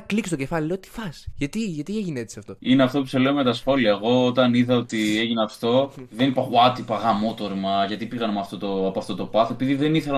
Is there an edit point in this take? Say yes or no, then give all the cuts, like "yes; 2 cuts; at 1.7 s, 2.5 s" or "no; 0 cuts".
no; 0 cuts